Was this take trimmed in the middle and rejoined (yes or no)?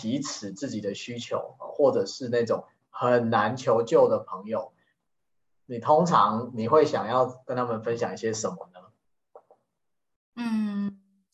no